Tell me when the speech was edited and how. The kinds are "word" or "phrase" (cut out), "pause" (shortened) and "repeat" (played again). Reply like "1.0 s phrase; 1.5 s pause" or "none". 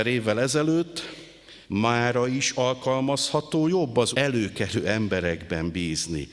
1.6 s pause; 4.1 s phrase